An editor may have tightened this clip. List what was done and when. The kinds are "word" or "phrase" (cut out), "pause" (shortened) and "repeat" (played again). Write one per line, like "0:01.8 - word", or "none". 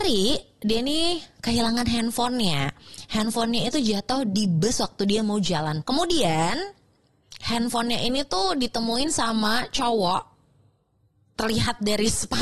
0:05.8 - word